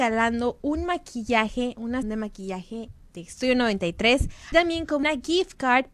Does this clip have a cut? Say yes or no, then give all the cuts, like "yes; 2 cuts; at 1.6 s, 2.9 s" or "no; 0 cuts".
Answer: yes; 3 cuts; at 2.0 s, 4.5 s, 5.0 s